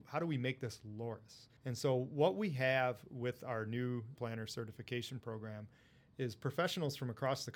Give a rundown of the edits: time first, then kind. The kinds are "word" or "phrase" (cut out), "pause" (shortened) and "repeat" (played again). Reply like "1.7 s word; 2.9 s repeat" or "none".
1.6 s pause; 4.2 s phrase